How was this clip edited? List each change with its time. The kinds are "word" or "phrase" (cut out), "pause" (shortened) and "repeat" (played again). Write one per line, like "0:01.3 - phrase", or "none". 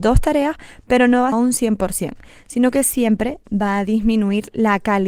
0:01.3 - phrase